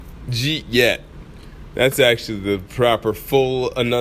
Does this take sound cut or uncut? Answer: uncut